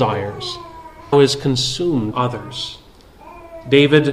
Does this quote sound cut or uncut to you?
cut